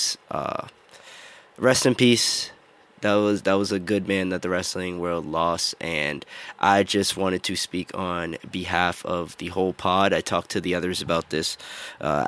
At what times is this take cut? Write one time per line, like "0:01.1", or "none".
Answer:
none

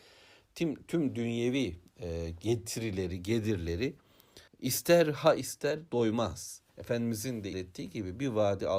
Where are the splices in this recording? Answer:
0:04.5
0:05.4
0:06.7
0:07.5

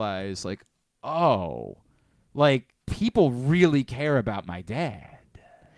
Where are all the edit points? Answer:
0:02.8

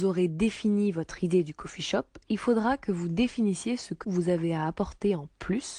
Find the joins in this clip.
0:04.0

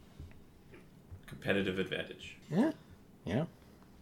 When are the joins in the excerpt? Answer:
0:02.4

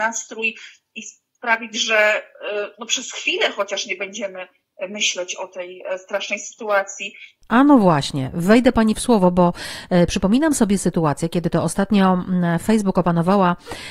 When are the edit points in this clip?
none

